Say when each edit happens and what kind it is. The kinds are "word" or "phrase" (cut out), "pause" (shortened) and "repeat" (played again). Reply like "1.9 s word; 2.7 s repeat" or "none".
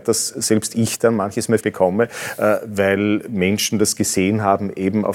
1.6 s word